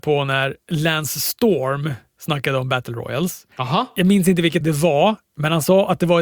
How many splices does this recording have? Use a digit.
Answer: 2